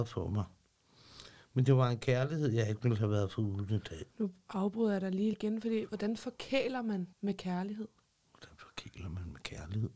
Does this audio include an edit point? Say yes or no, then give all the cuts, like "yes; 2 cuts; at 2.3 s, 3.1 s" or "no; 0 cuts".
yes; 3 cuts; at 4.1 s, 5.3 s, 7.1 s